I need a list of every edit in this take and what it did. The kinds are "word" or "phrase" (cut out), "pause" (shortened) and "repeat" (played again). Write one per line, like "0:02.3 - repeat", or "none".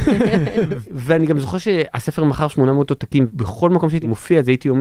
none